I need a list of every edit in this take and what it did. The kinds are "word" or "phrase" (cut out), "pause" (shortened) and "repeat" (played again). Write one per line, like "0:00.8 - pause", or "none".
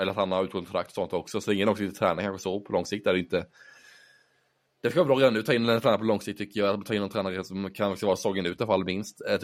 none

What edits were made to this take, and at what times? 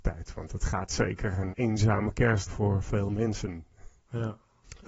0:01.5 - word
0:02.5 - word

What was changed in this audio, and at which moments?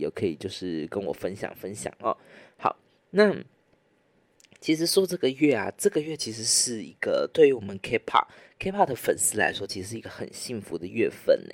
none

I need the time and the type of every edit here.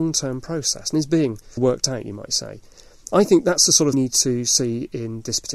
0:01.6 - word
0:03.9 - phrase

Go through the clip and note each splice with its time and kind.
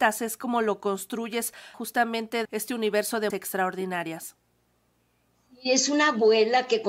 0:01.7 - word
0:02.4 - phrase
0:03.3 - word

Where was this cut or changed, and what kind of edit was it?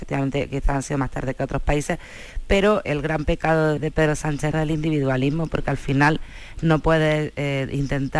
0:02.8 - word
0:03.8 - word
0:04.5 - word

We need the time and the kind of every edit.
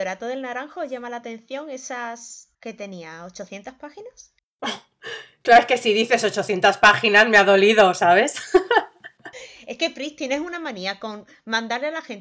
0:02.5 - pause

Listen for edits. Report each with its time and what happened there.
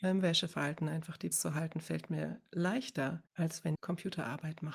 0:01.3 - word
0:03.3 - pause
0:03.7 - word

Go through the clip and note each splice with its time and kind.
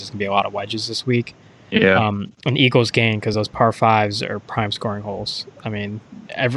none

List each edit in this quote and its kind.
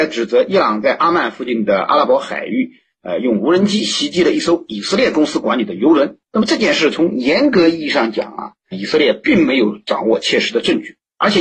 0:08.7 - word

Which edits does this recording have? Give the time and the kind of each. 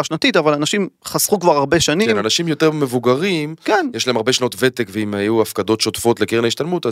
none

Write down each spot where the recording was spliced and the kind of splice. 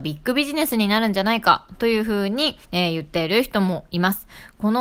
0:02.6 - pause

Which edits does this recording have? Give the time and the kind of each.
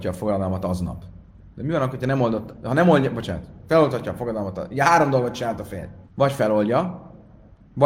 0:06.1 - pause

